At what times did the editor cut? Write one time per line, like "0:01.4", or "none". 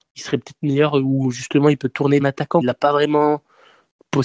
0:02.2
0:02.6